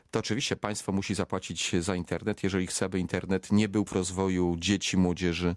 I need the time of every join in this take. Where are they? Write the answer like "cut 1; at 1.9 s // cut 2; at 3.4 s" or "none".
cut 1; at 3.9 s